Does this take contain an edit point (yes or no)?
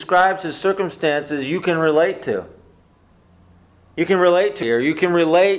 yes